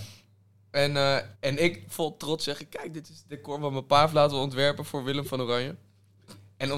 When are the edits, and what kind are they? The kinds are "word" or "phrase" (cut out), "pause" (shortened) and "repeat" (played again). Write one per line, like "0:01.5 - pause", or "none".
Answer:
0:01.3 - pause